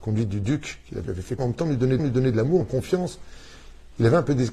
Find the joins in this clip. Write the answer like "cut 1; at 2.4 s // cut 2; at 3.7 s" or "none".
cut 1; at 1.0 s // cut 2; at 1.4 s // cut 3; at 2.0 s // cut 4; at 2.6 s